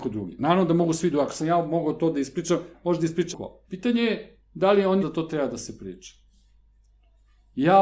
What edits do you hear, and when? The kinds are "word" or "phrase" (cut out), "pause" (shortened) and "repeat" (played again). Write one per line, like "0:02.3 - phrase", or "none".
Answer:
0:03.3 - word
0:03.6 - pause
0:05.0 - word